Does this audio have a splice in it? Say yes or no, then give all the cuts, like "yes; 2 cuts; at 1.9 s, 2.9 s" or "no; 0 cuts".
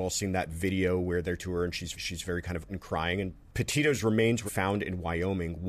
yes; 4 cuts; at 1.4 s, 1.9 s, 2.7 s, 4.5 s